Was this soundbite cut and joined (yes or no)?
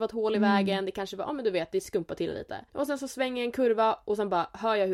yes